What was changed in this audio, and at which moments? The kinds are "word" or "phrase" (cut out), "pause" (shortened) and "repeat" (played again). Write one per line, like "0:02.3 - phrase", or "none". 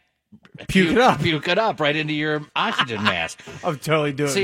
0:02.5 - pause